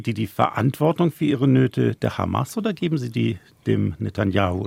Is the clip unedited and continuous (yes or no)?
yes